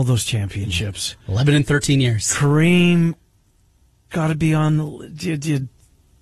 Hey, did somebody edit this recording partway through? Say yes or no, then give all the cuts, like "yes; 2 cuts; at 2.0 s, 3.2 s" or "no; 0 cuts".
yes; 1 cut; at 4.1 s